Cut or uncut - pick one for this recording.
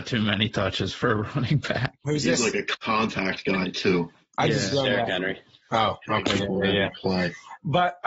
uncut